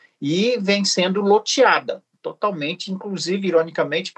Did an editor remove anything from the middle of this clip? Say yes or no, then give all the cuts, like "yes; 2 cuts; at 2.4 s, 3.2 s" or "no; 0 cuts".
no; 0 cuts